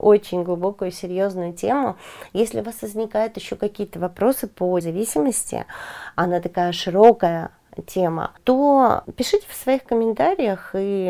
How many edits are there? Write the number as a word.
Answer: one